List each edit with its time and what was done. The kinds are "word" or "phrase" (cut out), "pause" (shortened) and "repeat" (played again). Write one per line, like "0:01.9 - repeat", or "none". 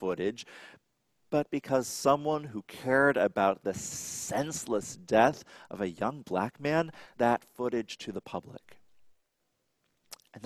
0:07.1 - word